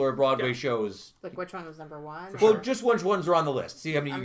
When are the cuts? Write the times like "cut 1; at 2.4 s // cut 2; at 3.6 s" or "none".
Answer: none